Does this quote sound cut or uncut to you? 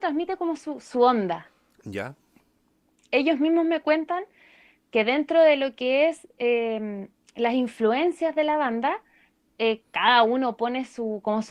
uncut